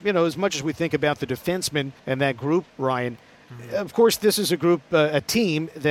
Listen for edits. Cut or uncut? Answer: cut